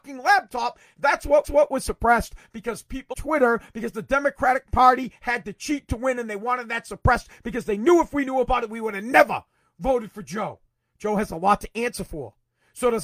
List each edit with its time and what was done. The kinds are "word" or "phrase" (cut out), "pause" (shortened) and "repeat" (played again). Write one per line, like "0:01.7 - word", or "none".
0:01.4 - repeat
0:03.1 - word